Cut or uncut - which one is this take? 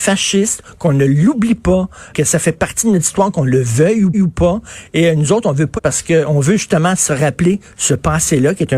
cut